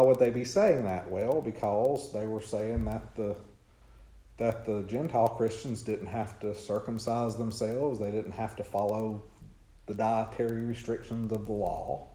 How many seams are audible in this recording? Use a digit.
0